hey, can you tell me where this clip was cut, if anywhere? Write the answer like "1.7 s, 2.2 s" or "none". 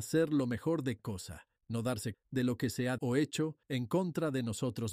1.0 s, 1.6 s, 2.1 s, 3.0 s, 3.6 s